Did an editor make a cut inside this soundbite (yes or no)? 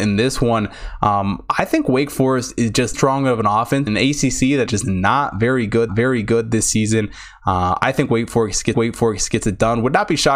yes